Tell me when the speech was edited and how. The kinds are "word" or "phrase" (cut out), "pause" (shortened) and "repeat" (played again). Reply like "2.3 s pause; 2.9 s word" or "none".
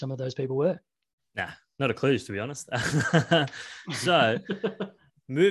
1.2 s pause